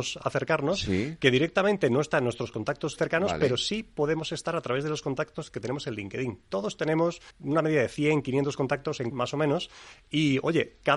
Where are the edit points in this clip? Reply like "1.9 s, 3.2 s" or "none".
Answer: 3.0 s, 7.3 s, 9.1 s